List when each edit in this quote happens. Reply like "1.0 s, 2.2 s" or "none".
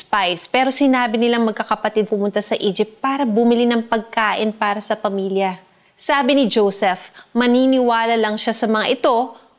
2.1 s